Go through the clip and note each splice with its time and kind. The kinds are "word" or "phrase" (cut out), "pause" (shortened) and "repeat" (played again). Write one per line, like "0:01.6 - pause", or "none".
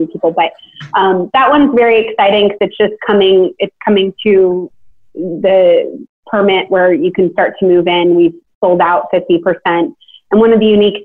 none